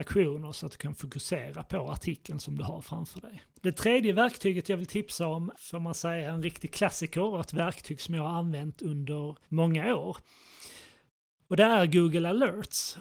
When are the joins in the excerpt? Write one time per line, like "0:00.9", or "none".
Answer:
0:03.5
0:05.5
0:09.4